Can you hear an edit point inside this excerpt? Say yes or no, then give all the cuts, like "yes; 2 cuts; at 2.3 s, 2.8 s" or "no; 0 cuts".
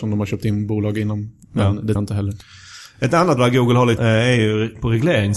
yes; 3 cuts; at 1.9 s, 3.4 s, 4.0 s